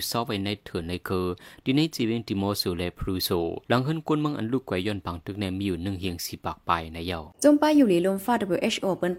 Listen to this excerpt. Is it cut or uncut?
cut